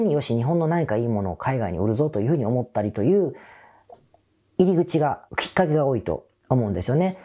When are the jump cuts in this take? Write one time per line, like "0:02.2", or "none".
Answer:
0:05.3